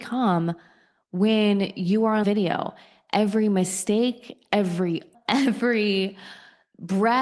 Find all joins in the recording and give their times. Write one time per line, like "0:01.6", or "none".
0:02.2
0:05.1